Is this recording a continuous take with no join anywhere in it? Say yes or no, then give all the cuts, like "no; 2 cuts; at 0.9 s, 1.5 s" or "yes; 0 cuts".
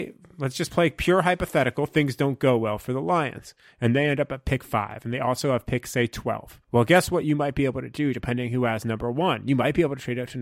no; 1 cut; at 6.6 s